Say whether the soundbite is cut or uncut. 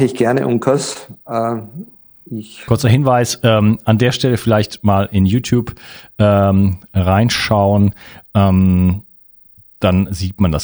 uncut